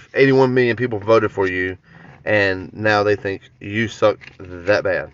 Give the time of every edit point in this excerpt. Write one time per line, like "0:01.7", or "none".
none